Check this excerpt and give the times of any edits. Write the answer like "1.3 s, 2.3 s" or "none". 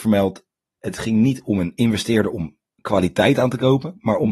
none